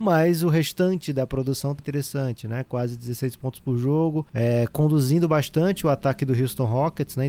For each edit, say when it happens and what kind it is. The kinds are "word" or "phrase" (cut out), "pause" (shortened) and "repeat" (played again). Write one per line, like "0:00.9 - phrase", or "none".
0:01.8 - word
0:04.3 - pause